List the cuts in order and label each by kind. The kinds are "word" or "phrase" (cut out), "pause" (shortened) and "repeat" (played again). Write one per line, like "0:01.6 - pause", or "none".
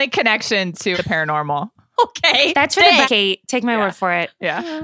0:00.9 - word
0:02.0 - word
0:03.0 - word

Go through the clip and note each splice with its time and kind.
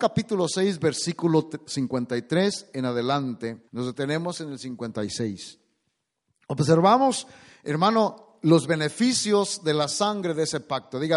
0:03.7 - pause

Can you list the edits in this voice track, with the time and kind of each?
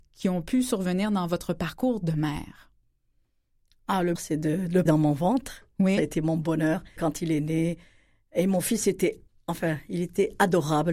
0:04.2 - word
0:04.9 - word
0:07.0 - word
0:09.3 - word

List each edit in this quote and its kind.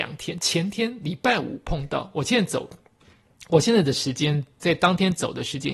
0:04.6 - word

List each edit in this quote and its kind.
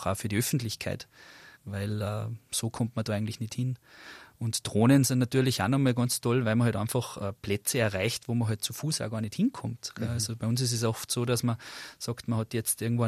0:01.6 - pause

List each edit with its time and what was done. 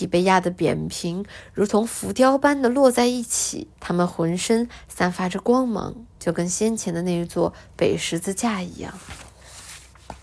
0:03.7 - pause
0:06.1 - pause

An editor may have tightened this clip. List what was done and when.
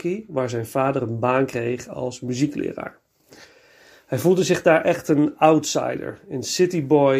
none

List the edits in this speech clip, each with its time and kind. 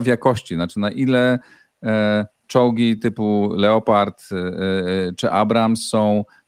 none

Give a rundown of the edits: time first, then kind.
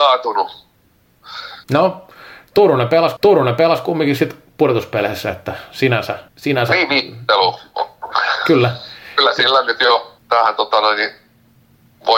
0:01.6 - pause
0:03.2 - repeat
0:06.3 - pause
0:10.2 - pause

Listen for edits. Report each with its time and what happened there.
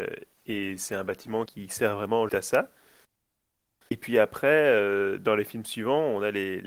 0:01.5 - word
0:02.3 - word

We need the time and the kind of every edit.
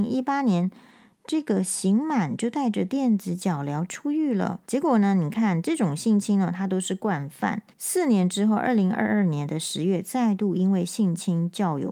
0:04.6 - pause
0:07.7 - pause

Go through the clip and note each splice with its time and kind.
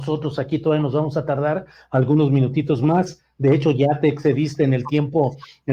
none

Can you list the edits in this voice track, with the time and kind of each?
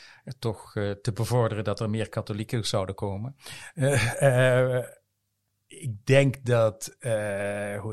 none

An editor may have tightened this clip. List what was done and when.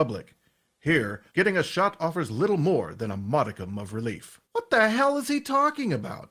0:01.3 - pause
0:04.4 - pause

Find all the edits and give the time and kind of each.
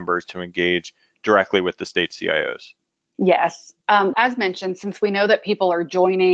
0:04.1 - word

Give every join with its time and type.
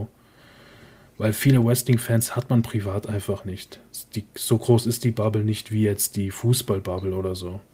none

